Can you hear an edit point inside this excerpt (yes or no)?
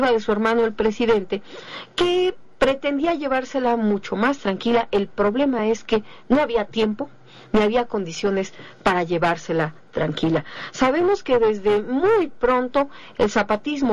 no